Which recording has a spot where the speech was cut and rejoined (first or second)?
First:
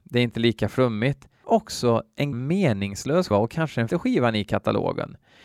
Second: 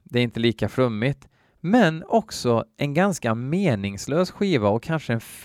first